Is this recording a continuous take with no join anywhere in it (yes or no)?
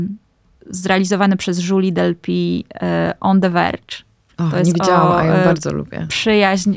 yes